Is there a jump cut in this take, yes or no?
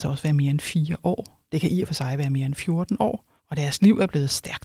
yes